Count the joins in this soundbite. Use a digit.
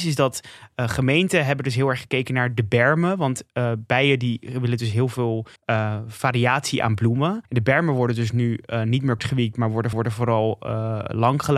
4